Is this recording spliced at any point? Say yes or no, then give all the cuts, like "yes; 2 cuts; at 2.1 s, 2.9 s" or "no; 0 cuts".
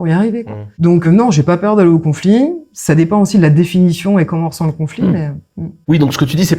yes; 1 cut; at 1.0 s